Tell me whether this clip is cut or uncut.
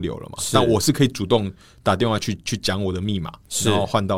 uncut